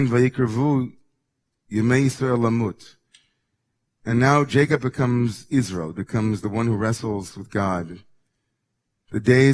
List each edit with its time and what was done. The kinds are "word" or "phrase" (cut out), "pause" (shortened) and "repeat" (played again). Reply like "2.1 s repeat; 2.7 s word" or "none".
none